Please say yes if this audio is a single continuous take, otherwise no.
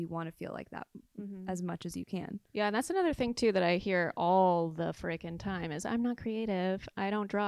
no